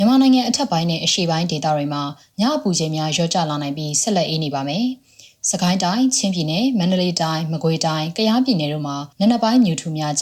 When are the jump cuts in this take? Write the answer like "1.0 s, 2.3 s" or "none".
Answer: 9.1 s